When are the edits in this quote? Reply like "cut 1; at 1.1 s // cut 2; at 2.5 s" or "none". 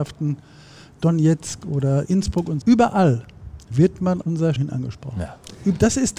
cut 1; at 2.1 s // cut 2; at 2.6 s // cut 3; at 4.2 s // cut 4; at 4.6 s